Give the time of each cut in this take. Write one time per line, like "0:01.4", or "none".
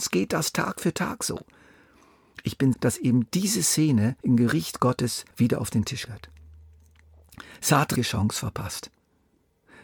0:02.7
0:04.2
0:05.3
0:06.1
0:08.0